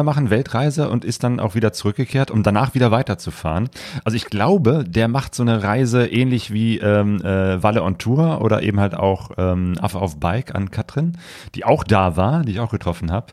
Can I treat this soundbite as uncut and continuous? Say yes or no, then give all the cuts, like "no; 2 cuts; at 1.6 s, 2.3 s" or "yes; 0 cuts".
yes; 0 cuts